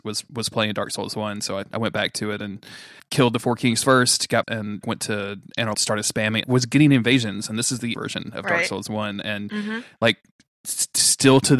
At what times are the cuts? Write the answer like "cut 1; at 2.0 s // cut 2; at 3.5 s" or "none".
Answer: cut 1; at 3.0 s // cut 2; at 4.4 s // cut 3; at 4.8 s // cut 4; at 5.7 s // cut 5; at 6.4 s // cut 6; at 7.9 s